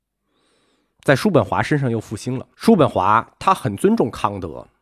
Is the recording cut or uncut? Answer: cut